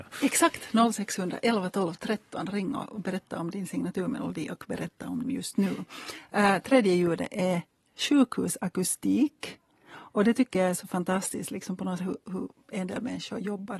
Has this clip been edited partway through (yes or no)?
yes